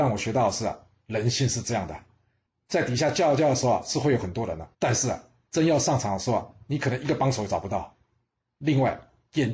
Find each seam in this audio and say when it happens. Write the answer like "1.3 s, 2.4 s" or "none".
4.7 s